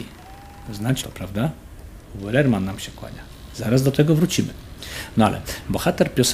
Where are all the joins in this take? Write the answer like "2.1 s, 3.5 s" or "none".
1.0 s